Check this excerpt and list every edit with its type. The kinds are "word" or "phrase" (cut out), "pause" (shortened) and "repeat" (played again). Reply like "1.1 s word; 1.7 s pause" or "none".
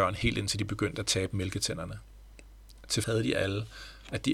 3.0 s word

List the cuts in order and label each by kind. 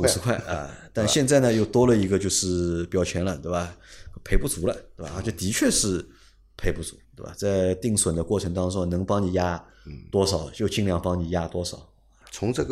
7.0 s pause

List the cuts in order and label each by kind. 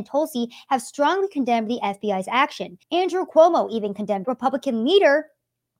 2.8 s pause; 4.2 s phrase

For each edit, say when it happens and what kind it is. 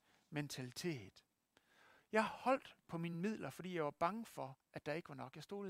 none

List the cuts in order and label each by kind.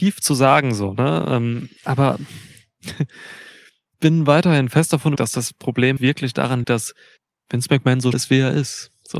1.8 s pause; 3.9 s word; 5.2 s word; 6.0 s word; 6.6 s word; 7.2 s pause; 8.1 s word

